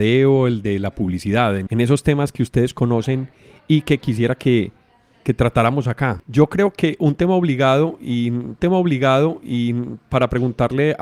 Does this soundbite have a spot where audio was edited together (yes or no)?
yes